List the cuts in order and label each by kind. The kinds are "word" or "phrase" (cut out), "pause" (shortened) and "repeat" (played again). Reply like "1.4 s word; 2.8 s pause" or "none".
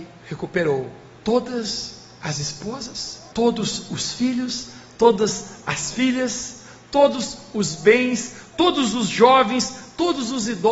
1.2 s pause; 3.3 s pause